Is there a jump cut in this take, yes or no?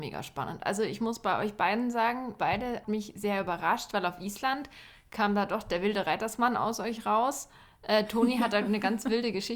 yes